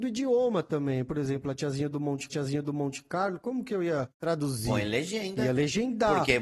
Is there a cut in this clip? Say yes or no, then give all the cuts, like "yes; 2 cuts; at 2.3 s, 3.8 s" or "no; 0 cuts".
yes; 2 cuts; at 2.3 s, 4.1 s